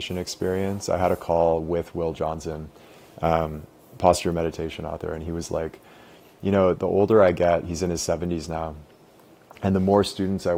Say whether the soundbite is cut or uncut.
cut